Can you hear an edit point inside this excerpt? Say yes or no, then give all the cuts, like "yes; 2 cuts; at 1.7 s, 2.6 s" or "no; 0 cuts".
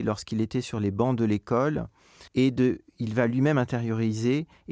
yes; 1 cut; at 2.3 s